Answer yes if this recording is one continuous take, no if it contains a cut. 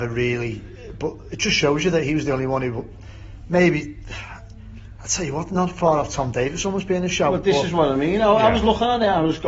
yes